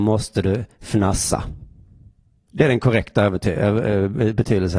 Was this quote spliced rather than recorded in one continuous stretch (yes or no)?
no